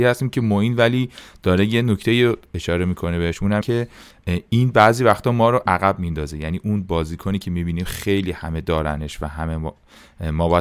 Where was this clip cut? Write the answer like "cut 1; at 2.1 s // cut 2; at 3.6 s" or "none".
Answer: cut 1; at 3.6 s